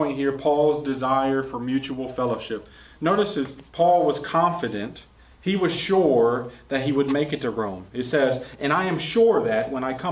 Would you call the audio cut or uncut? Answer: uncut